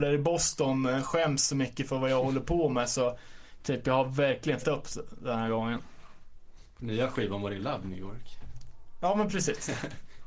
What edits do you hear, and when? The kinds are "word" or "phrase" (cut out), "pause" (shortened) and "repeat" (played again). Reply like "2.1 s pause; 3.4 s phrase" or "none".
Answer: 4.6 s word; 7.6 s phrase